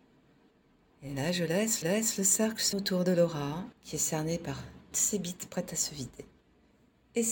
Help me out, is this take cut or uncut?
cut